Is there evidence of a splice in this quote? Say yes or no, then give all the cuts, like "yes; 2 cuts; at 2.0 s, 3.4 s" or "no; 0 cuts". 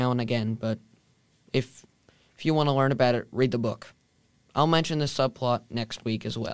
no; 0 cuts